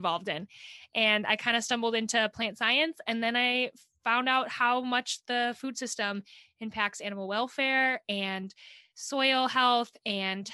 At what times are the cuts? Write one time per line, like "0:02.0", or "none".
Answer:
none